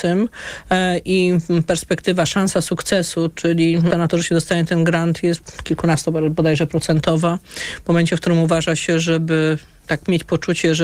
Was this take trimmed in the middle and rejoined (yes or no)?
yes